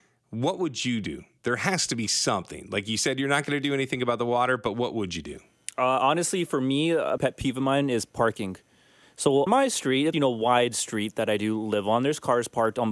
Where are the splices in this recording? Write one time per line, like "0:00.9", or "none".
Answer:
0:07.2
0:09.5
0:10.1